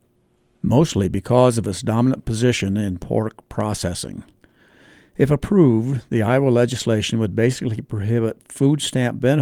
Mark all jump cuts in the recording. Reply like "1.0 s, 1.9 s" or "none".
none